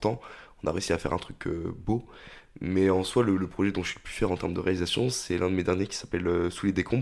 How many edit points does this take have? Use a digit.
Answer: 0